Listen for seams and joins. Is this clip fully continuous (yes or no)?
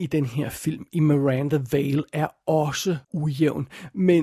no